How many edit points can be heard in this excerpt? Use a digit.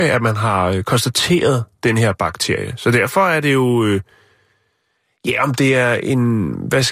0